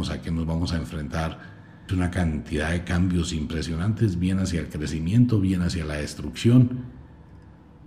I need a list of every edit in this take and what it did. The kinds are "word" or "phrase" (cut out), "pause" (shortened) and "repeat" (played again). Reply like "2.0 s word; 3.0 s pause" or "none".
1.9 s phrase